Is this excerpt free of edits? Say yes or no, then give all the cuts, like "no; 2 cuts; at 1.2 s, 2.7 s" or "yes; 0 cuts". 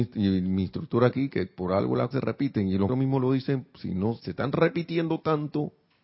no; 3 cuts; at 2.1 s, 2.9 s, 4.2 s